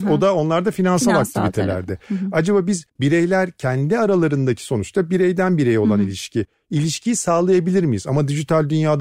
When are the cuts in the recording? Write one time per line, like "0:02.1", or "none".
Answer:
0:02.9

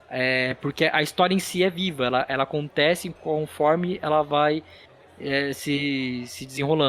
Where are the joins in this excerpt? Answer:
none

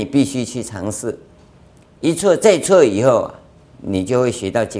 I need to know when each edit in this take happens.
none

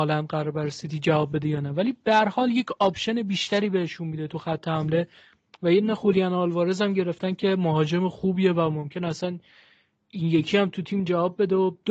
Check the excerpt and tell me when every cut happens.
none

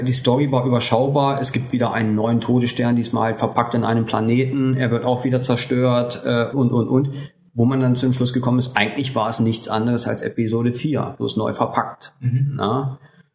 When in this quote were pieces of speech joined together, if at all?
0:06.5

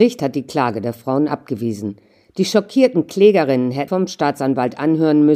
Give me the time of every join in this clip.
0:03.9

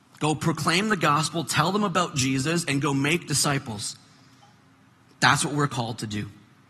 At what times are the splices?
none

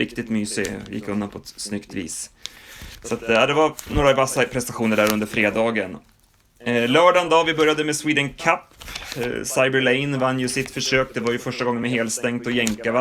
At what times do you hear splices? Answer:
none

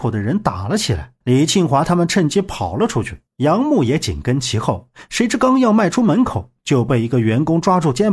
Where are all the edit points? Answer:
0:01.2
0:03.3

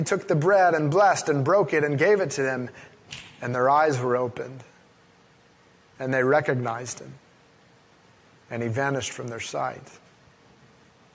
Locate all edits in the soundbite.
none

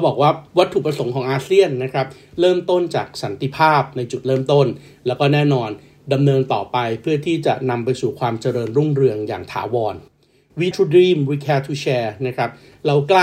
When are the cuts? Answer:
0:10.7

